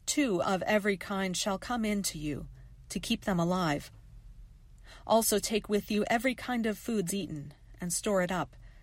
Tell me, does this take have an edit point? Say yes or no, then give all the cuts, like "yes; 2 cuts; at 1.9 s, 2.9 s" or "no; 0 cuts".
yes; 1 cut; at 7.1 s